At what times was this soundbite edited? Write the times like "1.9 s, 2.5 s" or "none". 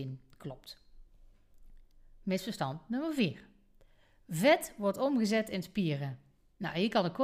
none